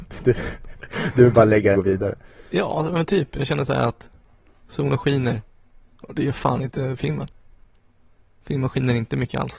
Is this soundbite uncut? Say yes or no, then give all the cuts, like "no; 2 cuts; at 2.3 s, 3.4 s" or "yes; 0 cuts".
no; 1 cut; at 1.7 s